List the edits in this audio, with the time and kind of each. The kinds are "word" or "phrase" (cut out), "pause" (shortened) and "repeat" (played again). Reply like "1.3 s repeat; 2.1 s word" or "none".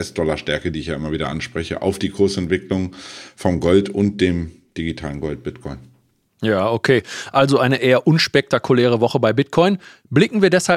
none